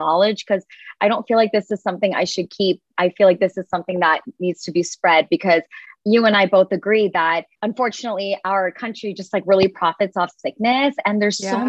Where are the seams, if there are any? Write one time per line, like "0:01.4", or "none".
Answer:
0:07.5